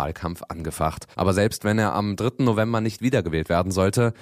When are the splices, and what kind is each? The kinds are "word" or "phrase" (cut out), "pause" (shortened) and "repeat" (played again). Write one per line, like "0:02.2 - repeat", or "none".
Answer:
0:01.1 - pause